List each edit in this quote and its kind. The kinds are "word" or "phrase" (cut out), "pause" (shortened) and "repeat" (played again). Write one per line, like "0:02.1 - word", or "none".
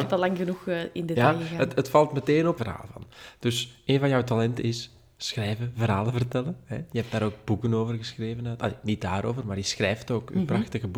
0:02.6 - phrase